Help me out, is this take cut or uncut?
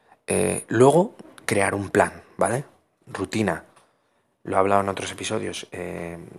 uncut